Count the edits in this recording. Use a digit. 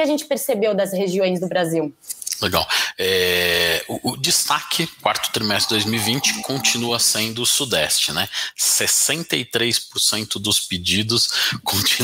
0